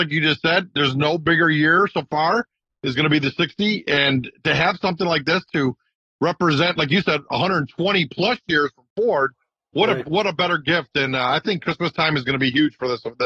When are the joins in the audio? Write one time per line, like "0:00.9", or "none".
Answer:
none